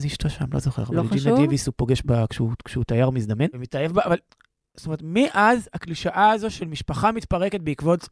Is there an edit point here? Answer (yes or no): no